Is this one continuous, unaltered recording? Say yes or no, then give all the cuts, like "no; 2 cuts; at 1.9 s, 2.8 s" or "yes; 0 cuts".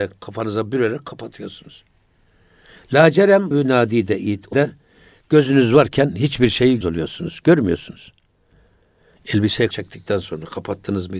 no; 4 cuts; at 3.5 s, 4.5 s, 6.8 s, 9.7 s